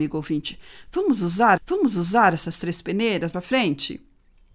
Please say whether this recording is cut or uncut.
cut